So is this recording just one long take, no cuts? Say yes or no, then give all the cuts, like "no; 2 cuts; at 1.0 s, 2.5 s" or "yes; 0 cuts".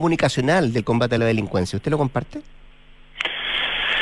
yes; 0 cuts